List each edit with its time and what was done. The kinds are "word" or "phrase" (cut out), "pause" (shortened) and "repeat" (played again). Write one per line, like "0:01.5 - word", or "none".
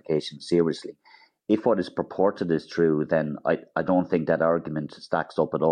none